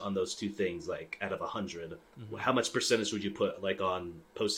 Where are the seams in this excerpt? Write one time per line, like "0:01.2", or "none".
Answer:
0:02.1